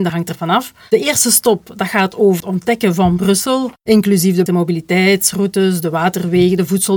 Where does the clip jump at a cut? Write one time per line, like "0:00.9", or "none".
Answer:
0:02.4
0:04.5